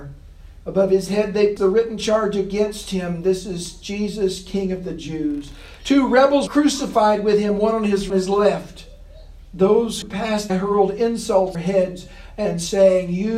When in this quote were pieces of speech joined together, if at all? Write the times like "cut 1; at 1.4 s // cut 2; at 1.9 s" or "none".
cut 1; at 1.6 s // cut 2; at 6.5 s // cut 3; at 8.1 s // cut 4; at 10.0 s // cut 5; at 10.5 s // cut 6; at 11.5 s